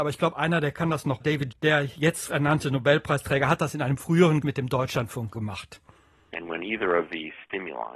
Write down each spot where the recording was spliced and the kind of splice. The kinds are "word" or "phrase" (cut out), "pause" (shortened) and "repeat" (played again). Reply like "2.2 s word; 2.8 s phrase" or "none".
1.2 s word; 1.5 s word; 2.3 s word; 4.4 s word; 5.3 s word